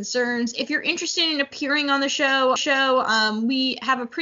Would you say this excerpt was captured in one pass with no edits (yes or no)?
no